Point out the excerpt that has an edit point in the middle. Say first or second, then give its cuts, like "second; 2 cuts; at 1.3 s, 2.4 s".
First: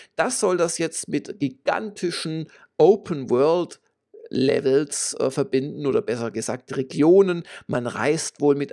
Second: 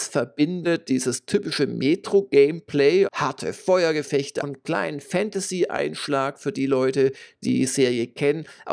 second; 3 cuts; at 3.1 s, 4.4 s, 7.4 s